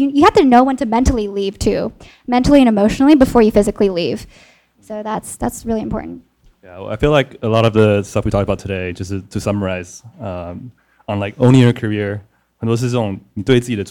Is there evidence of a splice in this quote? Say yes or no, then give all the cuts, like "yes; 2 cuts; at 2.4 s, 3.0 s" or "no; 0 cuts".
no; 0 cuts